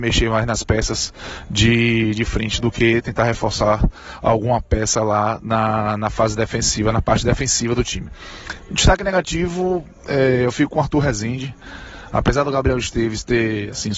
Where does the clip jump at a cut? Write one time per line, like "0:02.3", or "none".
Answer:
none